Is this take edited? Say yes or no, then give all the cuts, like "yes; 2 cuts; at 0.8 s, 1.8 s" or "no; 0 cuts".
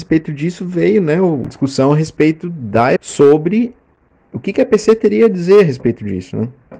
yes; 1 cut; at 3.0 s